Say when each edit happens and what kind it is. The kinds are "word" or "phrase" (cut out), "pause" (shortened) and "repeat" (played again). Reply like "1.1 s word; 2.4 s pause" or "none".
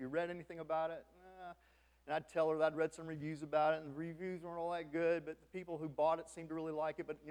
none